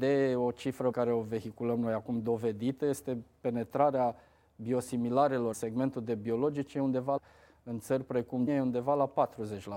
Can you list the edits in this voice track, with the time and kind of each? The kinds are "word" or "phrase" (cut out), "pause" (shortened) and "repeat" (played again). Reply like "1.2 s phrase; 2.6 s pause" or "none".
0.9 s word; 5.5 s word; 7.2 s word; 8.5 s word